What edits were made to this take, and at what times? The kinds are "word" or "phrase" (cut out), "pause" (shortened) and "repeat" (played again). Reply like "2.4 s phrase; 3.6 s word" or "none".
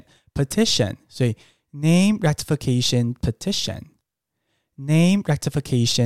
none